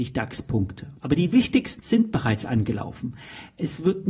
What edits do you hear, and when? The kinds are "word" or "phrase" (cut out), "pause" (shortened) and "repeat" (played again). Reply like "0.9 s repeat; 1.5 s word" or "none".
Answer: 1.0 s pause; 1.8 s word